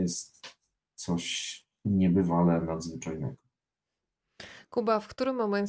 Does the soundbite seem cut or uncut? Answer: uncut